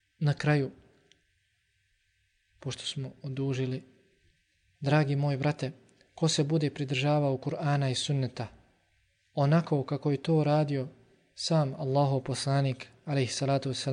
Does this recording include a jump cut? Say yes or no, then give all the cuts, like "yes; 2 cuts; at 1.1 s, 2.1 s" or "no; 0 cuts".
no; 0 cuts